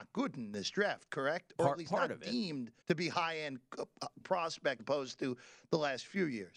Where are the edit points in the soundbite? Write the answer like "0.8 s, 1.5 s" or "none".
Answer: 2.8 s, 4.2 s, 4.8 s